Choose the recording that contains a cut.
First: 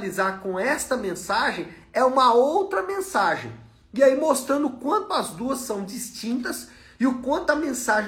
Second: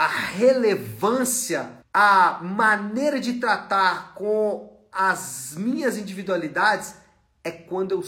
second; 1 cut; at 1.8 s

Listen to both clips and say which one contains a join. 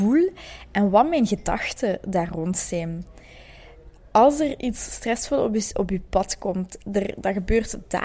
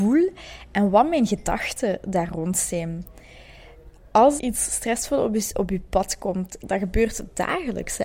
second; 2 cuts; at 4.4 s, 6.6 s

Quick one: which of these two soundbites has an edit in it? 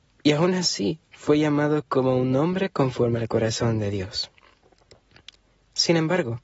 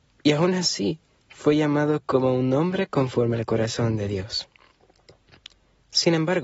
first; 1 cut; at 1.1 s

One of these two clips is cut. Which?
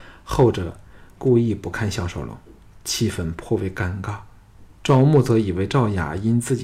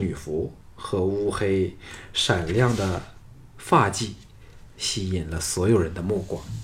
first; 1 cut; at 4.7 s

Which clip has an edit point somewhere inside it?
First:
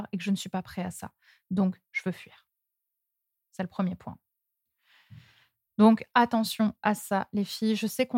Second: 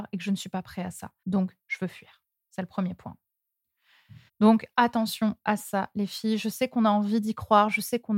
second; 3 cuts; at 1.2 s, 2.3 s, 4.3 s

